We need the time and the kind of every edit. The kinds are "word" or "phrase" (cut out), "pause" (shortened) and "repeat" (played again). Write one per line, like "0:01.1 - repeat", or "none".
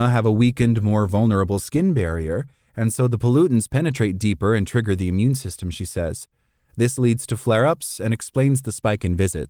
none